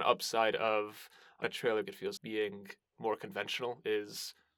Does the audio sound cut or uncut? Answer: cut